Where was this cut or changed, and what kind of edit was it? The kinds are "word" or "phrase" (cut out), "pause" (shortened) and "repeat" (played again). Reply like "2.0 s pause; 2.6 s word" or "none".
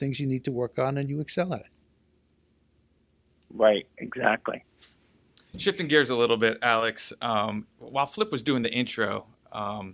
none